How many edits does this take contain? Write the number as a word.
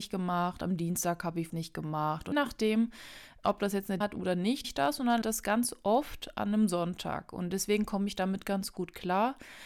six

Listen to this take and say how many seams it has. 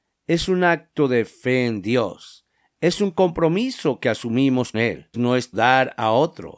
three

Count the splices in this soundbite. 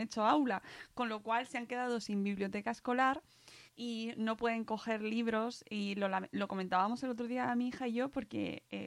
one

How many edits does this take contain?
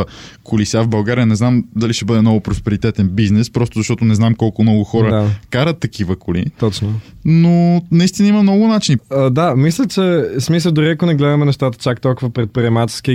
zero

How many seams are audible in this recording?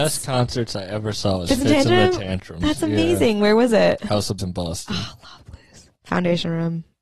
three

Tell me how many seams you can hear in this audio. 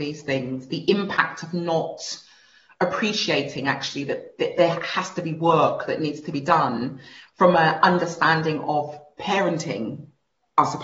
zero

